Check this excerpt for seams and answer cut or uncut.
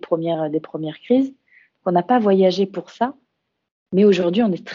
uncut